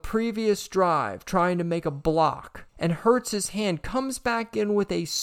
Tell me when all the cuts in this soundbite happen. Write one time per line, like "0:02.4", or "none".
0:02.7

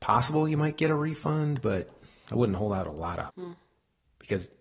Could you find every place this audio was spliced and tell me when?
0:03.3

